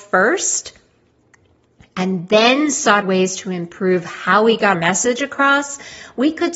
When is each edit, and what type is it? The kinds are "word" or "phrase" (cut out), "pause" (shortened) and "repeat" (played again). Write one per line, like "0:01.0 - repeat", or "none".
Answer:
0:03.0 - word
0:04.7 - word

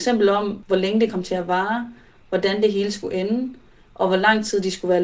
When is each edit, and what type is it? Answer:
none

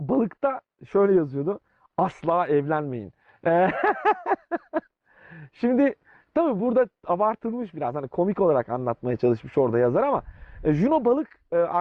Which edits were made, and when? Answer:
none

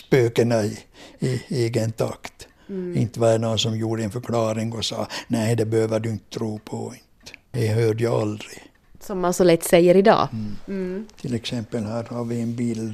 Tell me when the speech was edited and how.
0:07.5 - pause
0:08.8 - pause

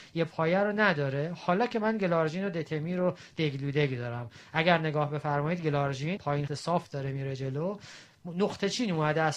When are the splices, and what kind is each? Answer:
0:06.2 - word
0:06.5 - word

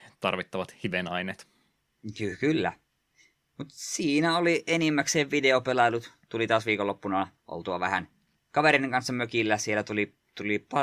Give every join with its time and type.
0:07.4 - pause

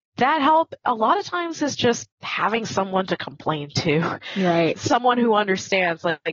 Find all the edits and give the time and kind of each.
0:02.1 - pause
0:04.7 - word

